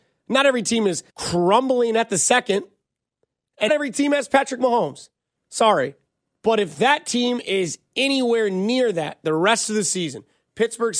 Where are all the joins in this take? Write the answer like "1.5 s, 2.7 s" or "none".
1.1 s, 3.7 s, 6.1 s